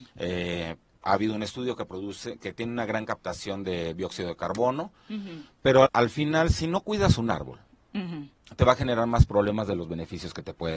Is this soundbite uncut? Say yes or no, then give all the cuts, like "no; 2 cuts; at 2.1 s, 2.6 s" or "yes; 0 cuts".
no; 1 cut; at 5.9 s